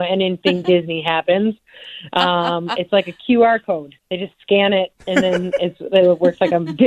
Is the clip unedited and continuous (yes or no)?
no